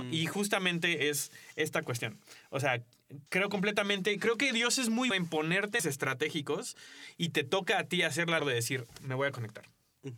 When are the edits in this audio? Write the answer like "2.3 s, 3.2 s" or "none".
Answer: 3.3 s, 5.1 s, 5.8 s, 8.4 s